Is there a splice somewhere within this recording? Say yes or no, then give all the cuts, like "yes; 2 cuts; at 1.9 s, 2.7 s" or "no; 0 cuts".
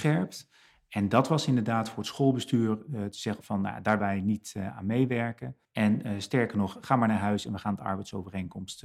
yes; 3 cuts; at 3.4 s, 4.0 s, 5.6 s